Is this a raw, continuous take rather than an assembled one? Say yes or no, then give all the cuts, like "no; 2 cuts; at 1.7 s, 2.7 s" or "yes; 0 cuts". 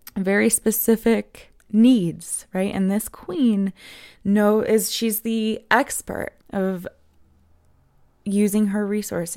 no; 2 cuts; at 1.6 s, 6.4 s